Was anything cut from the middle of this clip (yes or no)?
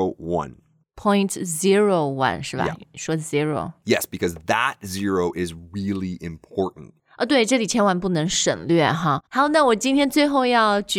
yes